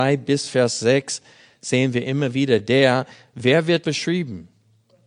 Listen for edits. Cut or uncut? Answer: cut